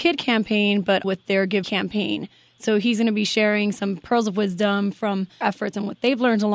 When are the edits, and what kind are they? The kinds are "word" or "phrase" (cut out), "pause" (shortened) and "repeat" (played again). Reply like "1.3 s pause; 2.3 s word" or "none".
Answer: 1.0 s word; 1.6 s word; 5.4 s word